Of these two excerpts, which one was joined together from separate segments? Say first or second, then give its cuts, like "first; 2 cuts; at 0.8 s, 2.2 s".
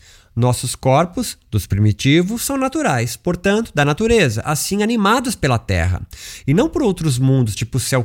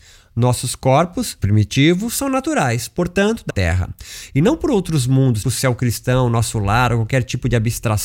second; 3 cuts; at 1.4 s, 3.5 s, 5.4 s